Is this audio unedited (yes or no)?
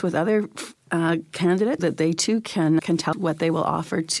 no